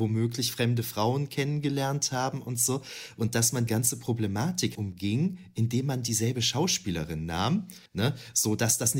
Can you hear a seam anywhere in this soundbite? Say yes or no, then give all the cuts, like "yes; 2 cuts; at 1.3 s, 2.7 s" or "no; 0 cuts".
yes; 3 cuts; at 3.7 s, 4.7 s, 7.9 s